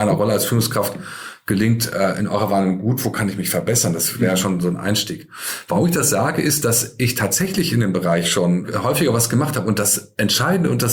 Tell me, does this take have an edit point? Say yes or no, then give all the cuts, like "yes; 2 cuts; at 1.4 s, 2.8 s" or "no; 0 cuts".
no; 0 cuts